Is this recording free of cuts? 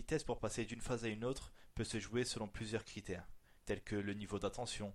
no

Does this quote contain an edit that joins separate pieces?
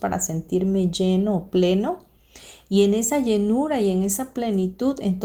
no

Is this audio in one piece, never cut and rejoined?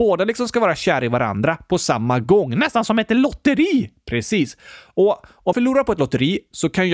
no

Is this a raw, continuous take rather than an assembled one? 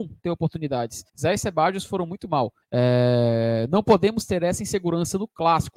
no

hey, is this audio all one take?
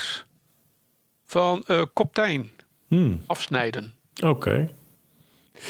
yes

